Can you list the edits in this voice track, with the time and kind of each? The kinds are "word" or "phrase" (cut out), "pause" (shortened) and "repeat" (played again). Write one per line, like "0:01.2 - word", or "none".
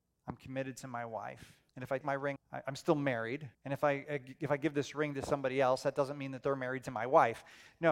0:01.7 - pause
0:02.0 - word
0:02.4 - word
0:03.5 - pause